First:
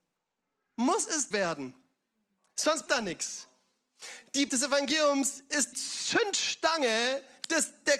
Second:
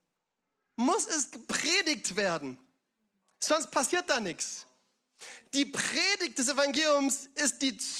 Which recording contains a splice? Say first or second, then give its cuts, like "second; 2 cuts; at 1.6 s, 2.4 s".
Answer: first; 4 cuts; at 1.3 s, 2.9 s, 4.5 s, 5.7 s